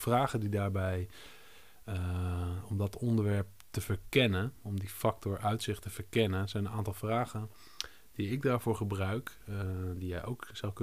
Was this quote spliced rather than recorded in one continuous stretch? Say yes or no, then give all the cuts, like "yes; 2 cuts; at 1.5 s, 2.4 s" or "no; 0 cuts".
no; 0 cuts